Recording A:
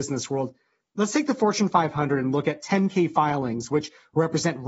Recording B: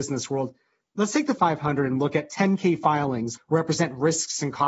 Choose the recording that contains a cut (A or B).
B